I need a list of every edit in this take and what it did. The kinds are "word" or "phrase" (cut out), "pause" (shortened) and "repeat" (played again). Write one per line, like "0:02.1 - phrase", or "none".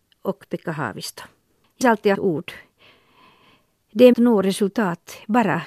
0:01.8 - word
0:02.1 - word
0:04.1 - phrase